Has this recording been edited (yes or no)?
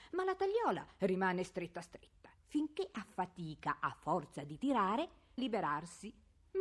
yes